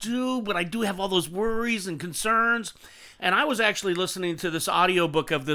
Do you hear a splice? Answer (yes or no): no